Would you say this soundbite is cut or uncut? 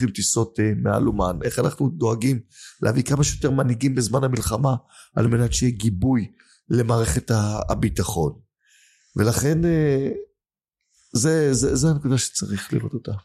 uncut